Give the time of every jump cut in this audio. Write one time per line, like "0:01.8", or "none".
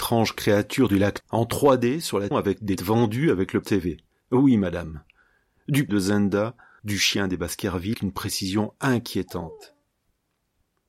0:01.2
0:02.3
0:02.8
0:03.6
0:05.9
0:06.8
0:07.9